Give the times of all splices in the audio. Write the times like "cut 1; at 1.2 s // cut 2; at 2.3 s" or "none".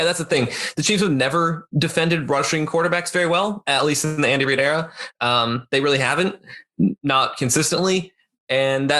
none